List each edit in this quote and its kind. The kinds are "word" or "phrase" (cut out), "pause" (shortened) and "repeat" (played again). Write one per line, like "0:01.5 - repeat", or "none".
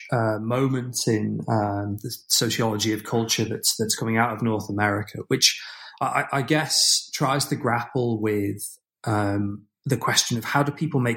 none

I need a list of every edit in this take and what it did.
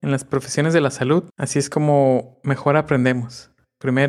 0:01.3 - pause

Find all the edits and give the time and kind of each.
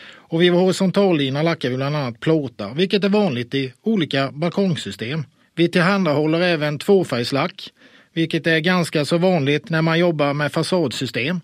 0:05.4 - pause

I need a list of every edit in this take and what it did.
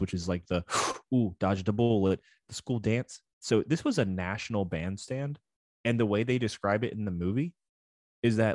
none

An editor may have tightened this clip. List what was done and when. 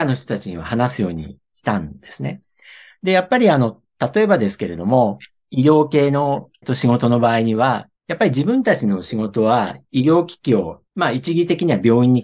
0:06.6 - phrase
0:08.0 - pause
0:10.9 - pause

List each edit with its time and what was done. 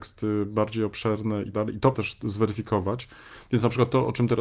0:01.5 - word
0:01.9 - word

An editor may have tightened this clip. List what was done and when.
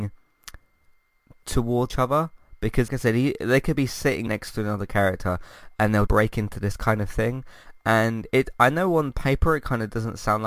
0:01.9 - word
0:02.9 - word
0:04.3 - word
0:06.1 - word

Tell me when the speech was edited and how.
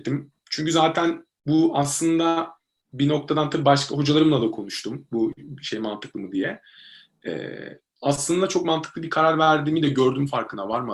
none

